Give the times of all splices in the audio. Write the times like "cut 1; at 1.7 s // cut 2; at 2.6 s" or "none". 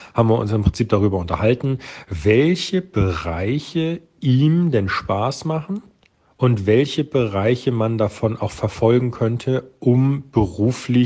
none